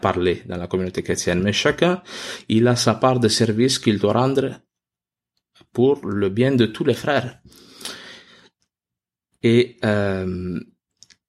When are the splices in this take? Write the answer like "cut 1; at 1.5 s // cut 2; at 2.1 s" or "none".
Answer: none